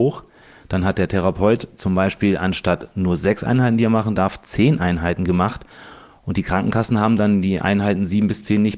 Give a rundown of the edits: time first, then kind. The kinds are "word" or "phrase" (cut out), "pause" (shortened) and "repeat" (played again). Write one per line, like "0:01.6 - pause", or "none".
none